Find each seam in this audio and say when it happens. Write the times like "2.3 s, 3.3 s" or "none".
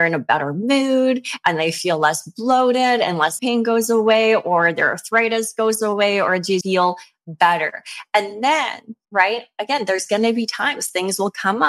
3.4 s, 6.6 s, 9.0 s